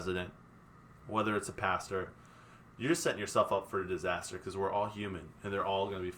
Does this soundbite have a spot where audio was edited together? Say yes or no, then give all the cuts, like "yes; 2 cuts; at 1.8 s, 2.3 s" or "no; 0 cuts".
no; 0 cuts